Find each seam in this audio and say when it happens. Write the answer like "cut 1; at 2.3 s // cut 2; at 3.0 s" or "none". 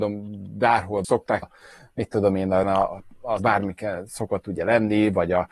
cut 1; at 1.0 s // cut 2; at 1.4 s // cut 3; at 2.6 s // cut 4; at 3.4 s